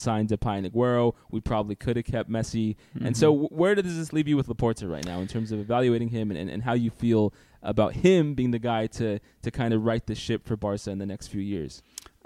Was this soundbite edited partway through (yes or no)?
no